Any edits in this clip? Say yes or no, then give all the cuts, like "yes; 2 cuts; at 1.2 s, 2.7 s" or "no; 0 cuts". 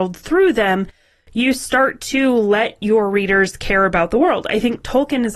no; 0 cuts